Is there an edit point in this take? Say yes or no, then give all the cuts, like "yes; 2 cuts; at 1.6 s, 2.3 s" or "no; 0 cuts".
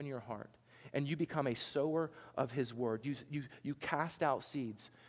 no; 0 cuts